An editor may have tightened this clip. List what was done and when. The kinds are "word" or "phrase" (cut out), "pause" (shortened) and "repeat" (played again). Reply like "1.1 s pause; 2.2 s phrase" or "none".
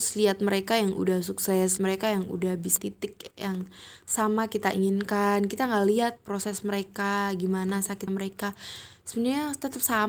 1.8 s word; 2.8 s word; 8.1 s word

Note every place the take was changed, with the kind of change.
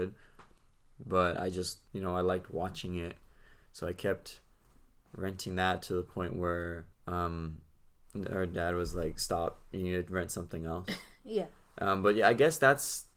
1.9 s pause; 6.9 s pause

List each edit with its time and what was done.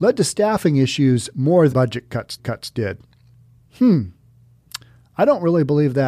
1.7 s word; 2.4 s repeat

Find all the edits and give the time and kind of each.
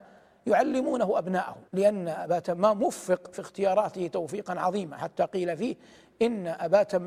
1.7 s pause

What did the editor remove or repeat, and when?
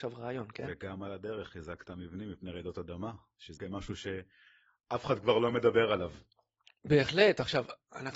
3.6 s word

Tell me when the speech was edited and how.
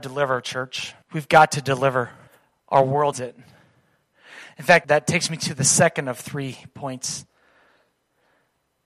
1.0 s pause; 2.3 s pause; 3.1 s word; 4.8 s word

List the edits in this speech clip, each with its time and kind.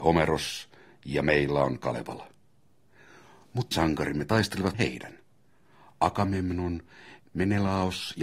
3.7 s word; 4.7 s phrase

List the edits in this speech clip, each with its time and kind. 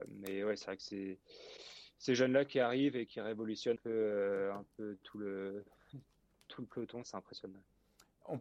3.1 s word; 3.8 s word; 7.0 s word

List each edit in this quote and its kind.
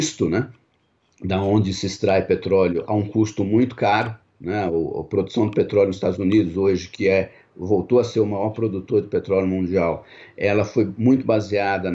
none

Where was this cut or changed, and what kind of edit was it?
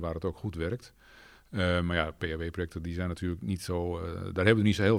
none

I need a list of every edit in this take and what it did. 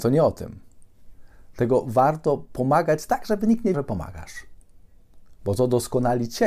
3.7 s word

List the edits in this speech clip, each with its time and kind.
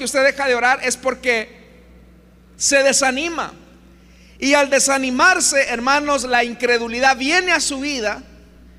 none

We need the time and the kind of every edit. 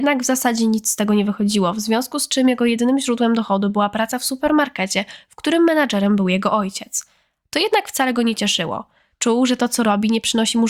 none

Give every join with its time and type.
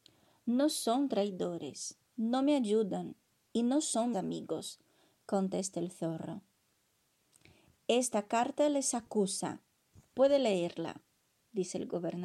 4.1 s word

